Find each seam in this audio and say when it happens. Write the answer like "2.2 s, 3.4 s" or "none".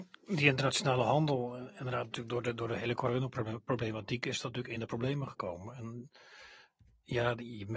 4.8 s